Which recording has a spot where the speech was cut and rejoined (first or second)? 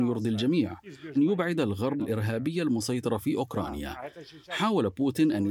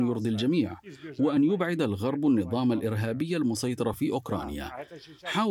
first